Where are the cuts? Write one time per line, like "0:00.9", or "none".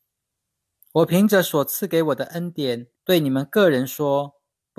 0:02.9